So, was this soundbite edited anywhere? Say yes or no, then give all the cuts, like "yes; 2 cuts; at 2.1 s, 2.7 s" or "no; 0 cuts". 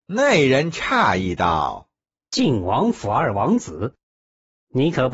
no; 0 cuts